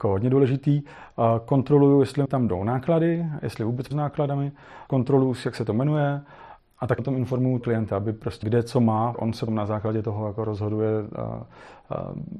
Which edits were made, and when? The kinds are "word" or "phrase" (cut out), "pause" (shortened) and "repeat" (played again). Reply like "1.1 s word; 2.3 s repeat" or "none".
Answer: 2.2 s word; 3.9 s word; 4.9 s word; 6.6 s word; 7.0 s word; 7.6 s word; 8.4 s word; 9.1 s word; 9.5 s word